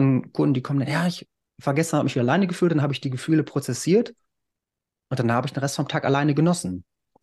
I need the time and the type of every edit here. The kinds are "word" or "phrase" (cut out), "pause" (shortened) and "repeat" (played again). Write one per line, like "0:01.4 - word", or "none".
none